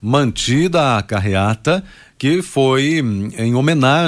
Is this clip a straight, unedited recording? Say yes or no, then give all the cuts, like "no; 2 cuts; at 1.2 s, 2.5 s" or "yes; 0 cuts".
yes; 0 cuts